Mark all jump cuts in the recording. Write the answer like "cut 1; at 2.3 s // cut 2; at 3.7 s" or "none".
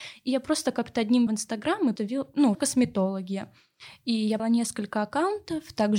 cut 1; at 1.3 s // cut 2; at 2.0 s // cut 3; at 2.5 s // cut 4; at 4.4 s